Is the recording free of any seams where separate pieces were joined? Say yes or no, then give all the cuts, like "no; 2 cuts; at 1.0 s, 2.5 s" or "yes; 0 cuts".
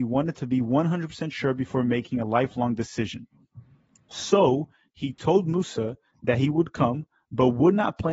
yes; 0 cuts